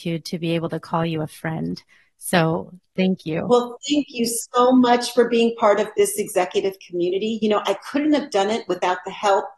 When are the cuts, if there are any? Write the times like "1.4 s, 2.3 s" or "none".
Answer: none